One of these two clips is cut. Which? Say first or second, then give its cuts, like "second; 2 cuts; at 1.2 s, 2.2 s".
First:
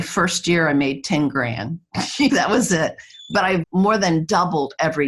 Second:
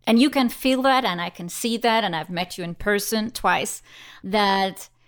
first; 2 cuts; at 2.3 s, 3.6 s